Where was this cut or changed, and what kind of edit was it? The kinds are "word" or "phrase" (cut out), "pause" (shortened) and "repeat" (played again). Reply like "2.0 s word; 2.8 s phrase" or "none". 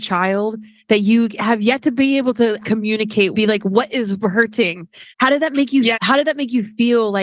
2.6 s word; 3.3 s phrase; 5.1 s pause; 5.9 s word